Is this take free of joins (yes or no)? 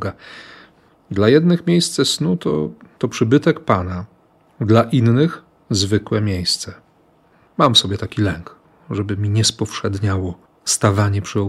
yes